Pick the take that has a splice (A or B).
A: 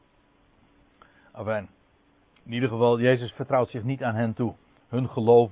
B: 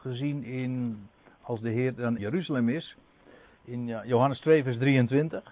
B